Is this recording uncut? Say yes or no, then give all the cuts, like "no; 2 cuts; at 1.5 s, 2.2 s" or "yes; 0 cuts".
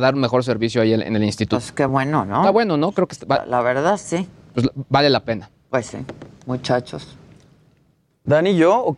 yes; 0 cuts